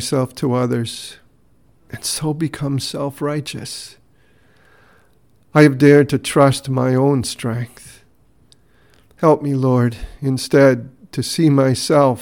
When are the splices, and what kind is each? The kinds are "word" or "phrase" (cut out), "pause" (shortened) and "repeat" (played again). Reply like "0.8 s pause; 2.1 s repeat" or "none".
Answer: none